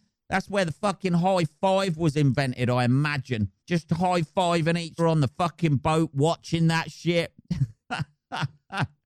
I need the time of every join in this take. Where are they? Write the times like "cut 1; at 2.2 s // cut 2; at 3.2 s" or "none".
cut 1; at 3.6 s // cut 2; at 5.0 s // cut 3; at 7.8 s